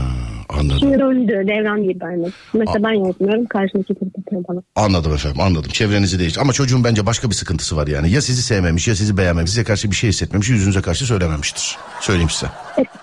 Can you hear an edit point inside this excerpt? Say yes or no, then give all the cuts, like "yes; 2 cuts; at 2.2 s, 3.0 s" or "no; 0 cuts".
yes; 4 cuts; at 1.0 s, 1.8 s, 4.0 s, 9.5 s